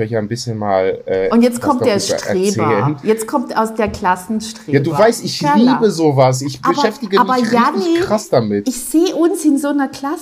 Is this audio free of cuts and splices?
yes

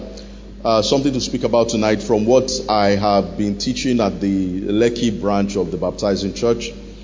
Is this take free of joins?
yes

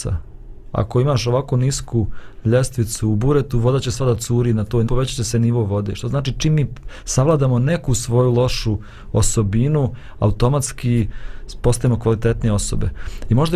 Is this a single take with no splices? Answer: no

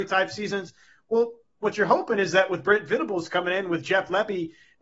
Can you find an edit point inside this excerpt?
no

